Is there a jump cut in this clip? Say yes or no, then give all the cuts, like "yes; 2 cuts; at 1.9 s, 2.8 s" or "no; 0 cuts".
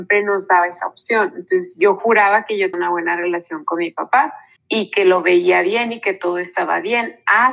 yes; 2 cuts; at 2.7 s, 4.6 s